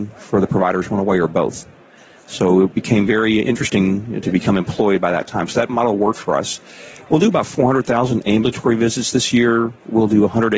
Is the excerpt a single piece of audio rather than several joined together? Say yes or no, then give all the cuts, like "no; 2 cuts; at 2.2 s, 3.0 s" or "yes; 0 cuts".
yes; 0 cuts